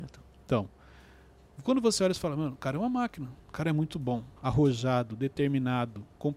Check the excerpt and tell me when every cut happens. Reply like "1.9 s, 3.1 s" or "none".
3.4 s, 4.4 s